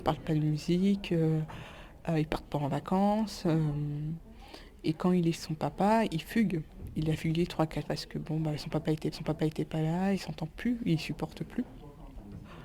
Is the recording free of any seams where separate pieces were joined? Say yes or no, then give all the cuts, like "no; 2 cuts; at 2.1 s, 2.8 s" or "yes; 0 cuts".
no; 4 cuts; at 5.3 s, 7.8 s, 9.1 s, 10.1 s